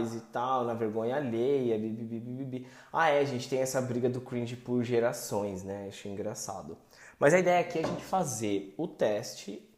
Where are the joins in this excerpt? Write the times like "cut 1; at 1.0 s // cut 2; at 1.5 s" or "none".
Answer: none